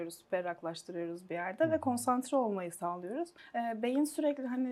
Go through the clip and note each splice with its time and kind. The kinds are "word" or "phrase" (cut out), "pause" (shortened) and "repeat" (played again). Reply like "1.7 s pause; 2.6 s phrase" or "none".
3.4 s pause